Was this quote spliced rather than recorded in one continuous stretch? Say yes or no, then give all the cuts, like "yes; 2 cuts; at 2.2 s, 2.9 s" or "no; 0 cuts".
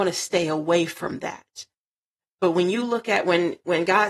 no; 0 cuts